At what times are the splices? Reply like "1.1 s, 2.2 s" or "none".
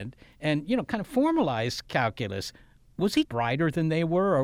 3.2 s